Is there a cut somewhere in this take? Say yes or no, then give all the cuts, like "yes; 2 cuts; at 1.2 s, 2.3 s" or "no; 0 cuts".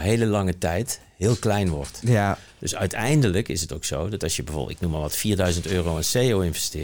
no; 0 cuts